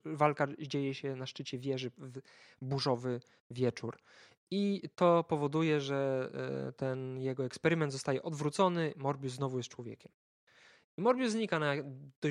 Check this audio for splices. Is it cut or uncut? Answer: uncut